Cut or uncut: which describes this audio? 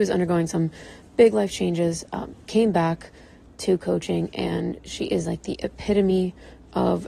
uncut